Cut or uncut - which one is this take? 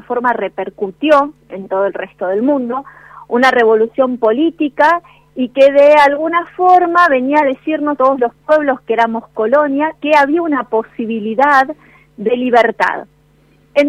cut